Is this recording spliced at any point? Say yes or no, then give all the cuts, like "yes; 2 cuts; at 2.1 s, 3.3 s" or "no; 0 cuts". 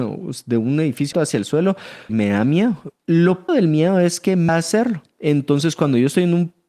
yes; 4 cuts; at 1.1 s, 2.1 s, 3.5 s, 4.5 s